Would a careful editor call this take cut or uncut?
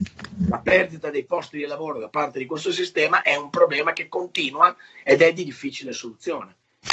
uncut